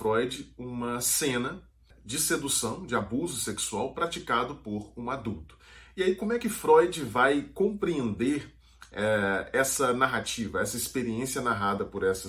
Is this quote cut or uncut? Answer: uncut